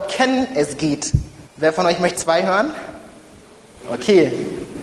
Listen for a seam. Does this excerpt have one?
yes; 2 cuts; at 1.5 s, 2.1 s

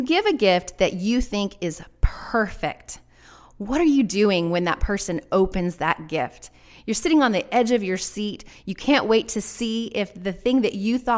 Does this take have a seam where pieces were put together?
no; 0 cuts

